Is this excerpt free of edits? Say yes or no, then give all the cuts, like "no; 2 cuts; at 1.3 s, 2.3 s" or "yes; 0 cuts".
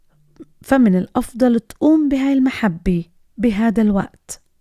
yes; 0 cuts